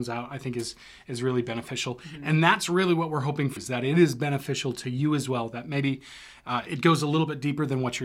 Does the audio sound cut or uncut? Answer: cut